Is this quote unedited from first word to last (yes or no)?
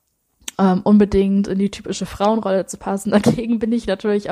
yes